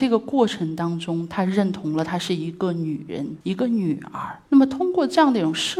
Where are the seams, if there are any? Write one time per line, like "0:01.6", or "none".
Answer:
0:03.4
0:04.5

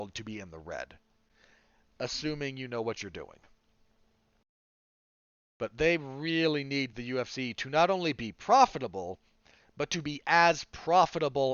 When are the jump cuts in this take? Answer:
none

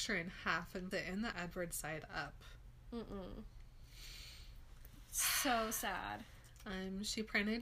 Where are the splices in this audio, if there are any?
0:00.9
0:01.3

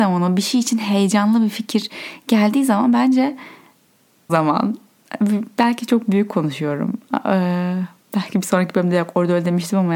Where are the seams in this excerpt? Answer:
0:04.3

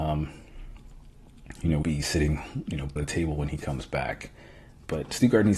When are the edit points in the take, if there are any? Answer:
0:01.8
0:03.0

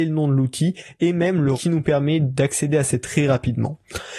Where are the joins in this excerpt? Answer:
0:01.5
0:03.0

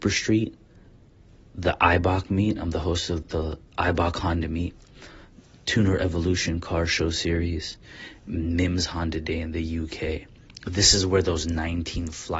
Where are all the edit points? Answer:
0:03.2
0:03.6

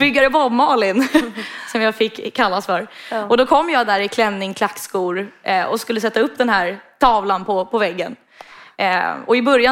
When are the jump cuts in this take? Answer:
none

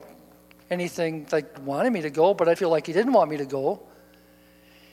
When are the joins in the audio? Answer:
0:01.5
0:02.6

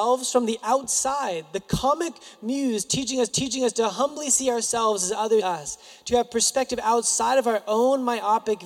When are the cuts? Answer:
0:03.3
0:05.4

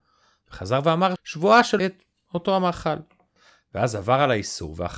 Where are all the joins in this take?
0:01.2
0:01.8

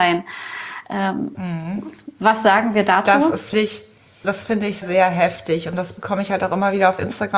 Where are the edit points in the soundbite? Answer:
0:01.3
0:03.5
0:04.2
0:04.8

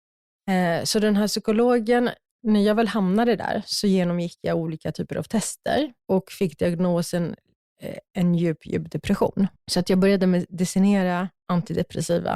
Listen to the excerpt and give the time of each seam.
0:06.0
0:09.6
0:11.3

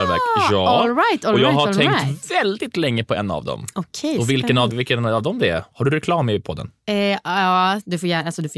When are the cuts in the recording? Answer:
0:04.7

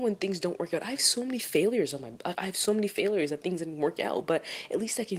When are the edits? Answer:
0:02.3

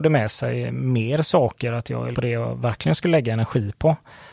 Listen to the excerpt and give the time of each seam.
0:02.1

